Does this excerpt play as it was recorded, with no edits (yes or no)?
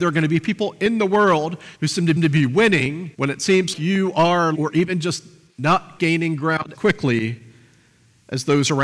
no